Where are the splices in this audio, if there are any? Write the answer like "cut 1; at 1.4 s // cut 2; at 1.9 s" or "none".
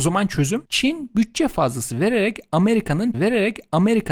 cut 1; at 3.1 s